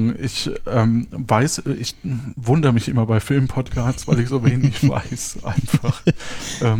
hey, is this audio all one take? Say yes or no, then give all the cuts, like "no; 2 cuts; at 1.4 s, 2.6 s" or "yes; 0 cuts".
yes; 0 cuts